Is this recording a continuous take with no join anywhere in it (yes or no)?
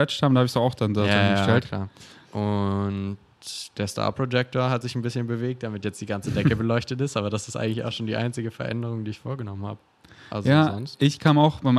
yes